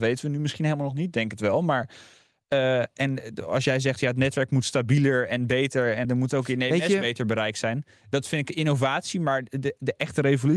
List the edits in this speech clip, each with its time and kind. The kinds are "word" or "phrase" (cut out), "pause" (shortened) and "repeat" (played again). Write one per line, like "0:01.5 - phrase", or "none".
0:06.0 - word